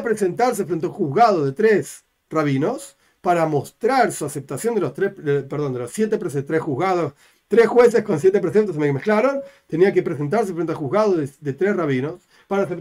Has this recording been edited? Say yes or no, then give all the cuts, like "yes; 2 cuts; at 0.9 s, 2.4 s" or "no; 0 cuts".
no; 0 cuts